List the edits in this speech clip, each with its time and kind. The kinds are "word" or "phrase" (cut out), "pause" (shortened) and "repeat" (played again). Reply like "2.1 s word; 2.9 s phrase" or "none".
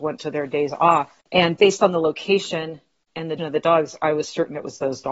1.2 s pause; 3.4 s word

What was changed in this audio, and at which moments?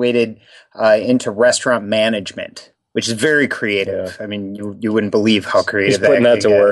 none

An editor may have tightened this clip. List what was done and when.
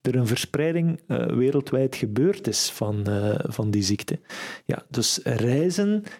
none

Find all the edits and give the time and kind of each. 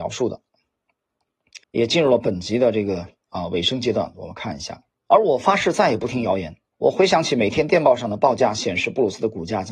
1.6 s pause; 4.9 s pause; 6.7 s pause

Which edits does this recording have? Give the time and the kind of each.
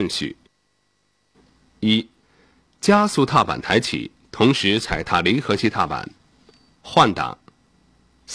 6.8 s word

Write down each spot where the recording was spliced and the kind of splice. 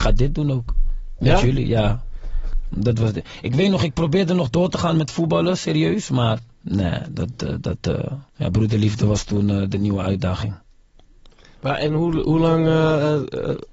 6.5 s pause; 8.3 s pause

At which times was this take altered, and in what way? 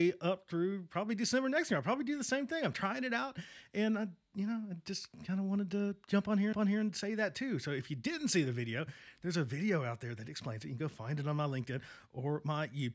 6.5 s repeat

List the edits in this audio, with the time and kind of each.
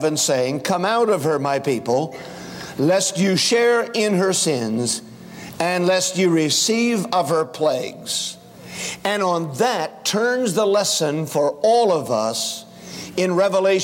none

